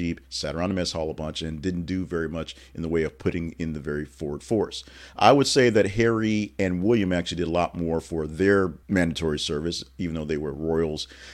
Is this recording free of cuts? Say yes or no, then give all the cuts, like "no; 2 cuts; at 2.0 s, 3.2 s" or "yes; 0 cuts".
no; 1 cut; at 8.8 s